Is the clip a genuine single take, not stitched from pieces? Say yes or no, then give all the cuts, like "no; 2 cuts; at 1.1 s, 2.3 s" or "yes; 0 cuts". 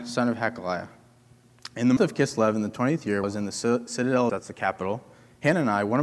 no; 3 cuts; at 2.0 s, 3.2 s, 4.3 s